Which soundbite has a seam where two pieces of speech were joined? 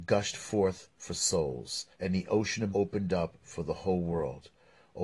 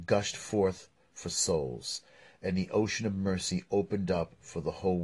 first; 3 cuts; at 0.9 s, 1.9 s, 2.7 s

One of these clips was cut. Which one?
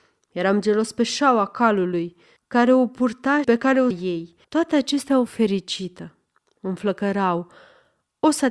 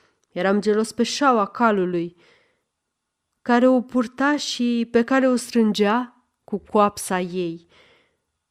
first; 5 cuts; at 2.4 s, 3.4 s, 3.9 s, 4.4 s, 5.3 s

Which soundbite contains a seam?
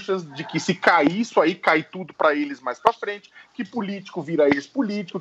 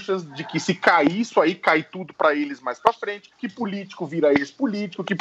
second; 1 cut; at 3.3 s

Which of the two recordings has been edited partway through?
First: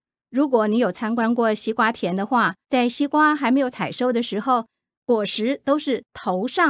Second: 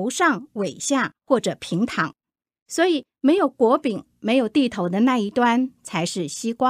first; 1 cut; at 2.6 s

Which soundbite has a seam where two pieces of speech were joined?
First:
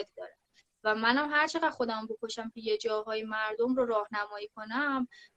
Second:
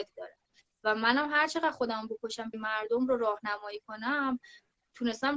second; 1 cut; at 2.5 s

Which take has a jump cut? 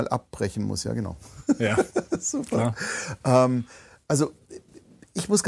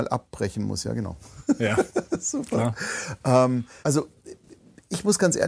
second; 1 cut; at 3.8 s

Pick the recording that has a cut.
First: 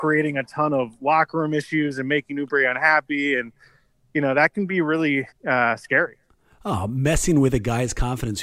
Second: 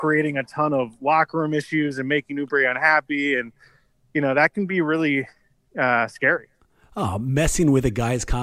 first; 1 cut; at 5.3 s

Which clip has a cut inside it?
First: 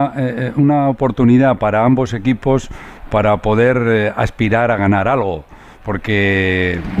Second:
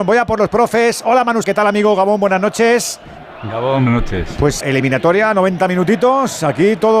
second; 3 cuts; at 1.4 s, 3.9 s, 4.6 s

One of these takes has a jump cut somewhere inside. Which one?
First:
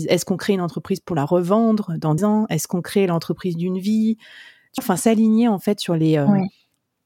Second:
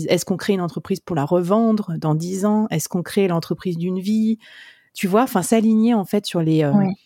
first; 2 cuts; at 2.2 s, 4.8 s

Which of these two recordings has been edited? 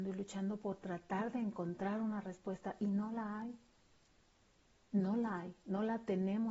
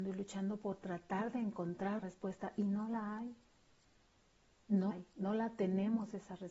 second; 2 cuts; at 2.0 s, 4.9 s

